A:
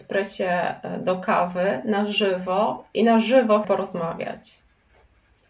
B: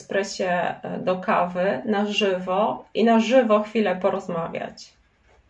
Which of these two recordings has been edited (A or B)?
A